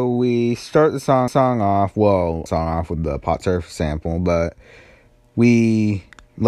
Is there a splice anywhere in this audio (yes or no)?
yes